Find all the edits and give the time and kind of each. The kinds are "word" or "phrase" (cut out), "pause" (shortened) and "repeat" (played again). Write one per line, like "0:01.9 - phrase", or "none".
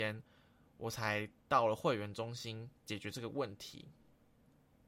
0:02.8 - pause

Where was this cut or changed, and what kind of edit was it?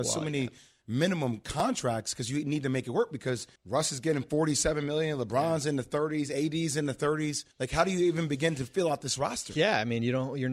0:03.6 - pause
0:07.5 - pause

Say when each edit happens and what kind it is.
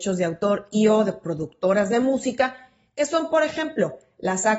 none

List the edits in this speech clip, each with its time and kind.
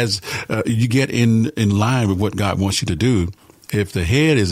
none

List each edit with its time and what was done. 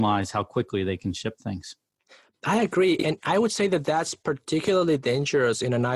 none

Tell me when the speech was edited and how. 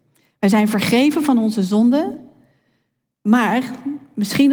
none

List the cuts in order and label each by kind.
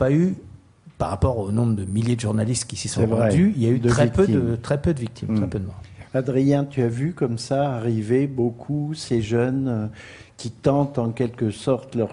none

